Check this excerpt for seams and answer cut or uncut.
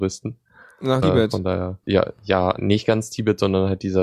cut